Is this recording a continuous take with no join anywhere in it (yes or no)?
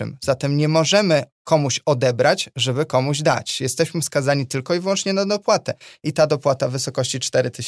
yes